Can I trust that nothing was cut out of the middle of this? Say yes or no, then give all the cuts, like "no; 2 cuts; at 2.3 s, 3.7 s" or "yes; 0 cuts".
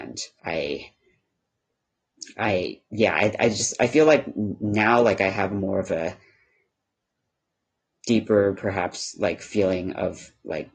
yes; 0 cuts